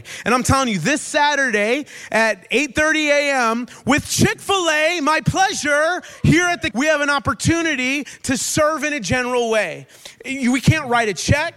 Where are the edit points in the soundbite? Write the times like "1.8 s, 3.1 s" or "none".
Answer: 6.7 s